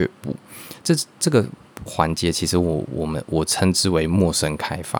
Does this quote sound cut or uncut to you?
uncut